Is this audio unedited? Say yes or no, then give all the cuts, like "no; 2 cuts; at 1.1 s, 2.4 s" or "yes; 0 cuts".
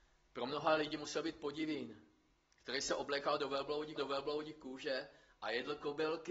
no; 1 cut; at 4.0 s